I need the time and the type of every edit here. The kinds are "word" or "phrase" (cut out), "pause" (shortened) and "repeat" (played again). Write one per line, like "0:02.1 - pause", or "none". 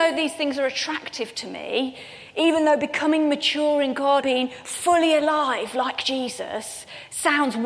0:04.2 - word